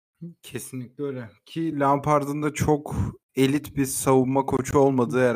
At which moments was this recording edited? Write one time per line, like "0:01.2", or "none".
none